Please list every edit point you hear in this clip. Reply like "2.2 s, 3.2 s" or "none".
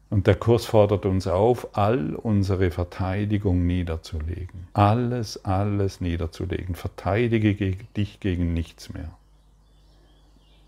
4.7 s